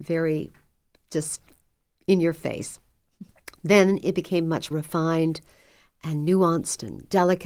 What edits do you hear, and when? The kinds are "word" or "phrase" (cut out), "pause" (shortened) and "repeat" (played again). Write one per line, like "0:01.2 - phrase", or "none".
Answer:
0:04.7 - word